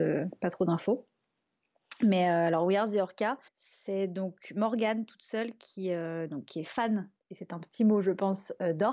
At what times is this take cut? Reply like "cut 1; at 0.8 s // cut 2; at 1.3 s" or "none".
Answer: cut 1; at 3.5 s // cut 2; at 7.2 s